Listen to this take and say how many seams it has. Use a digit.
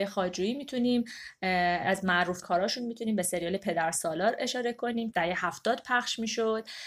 2